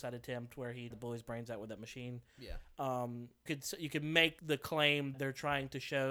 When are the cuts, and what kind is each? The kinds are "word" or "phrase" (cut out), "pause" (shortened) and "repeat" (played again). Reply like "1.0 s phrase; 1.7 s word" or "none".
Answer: 0.9 s word; 3.5 s word; 4.4 s word; 5.1 s word